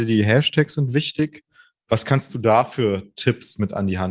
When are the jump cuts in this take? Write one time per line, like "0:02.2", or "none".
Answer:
none